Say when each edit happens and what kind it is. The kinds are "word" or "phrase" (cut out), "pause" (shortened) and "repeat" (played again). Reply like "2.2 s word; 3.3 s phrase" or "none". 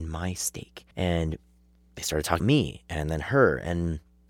0.9 s pause; 2.4 s word